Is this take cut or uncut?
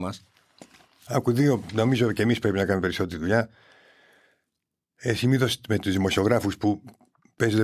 uncut